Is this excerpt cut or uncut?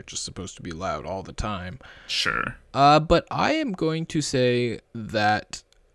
cut